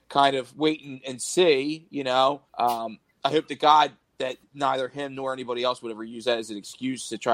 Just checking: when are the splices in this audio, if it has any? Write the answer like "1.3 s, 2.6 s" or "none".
2.5 s